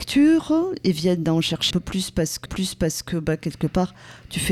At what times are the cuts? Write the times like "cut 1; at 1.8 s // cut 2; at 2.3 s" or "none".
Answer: cut 1; at 1.7 s // cut 2; at 2.5 s